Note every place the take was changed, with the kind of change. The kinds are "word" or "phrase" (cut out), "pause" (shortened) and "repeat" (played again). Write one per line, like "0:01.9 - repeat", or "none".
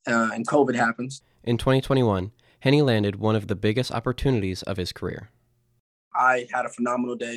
none